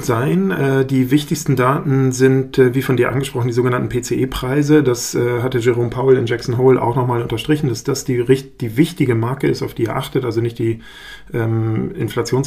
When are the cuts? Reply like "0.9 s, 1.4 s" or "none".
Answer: none